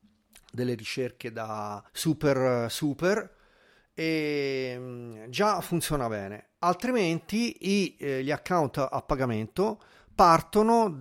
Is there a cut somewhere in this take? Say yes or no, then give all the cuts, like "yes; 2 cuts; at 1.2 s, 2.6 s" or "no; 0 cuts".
yes; 1 cut; at 1.9 s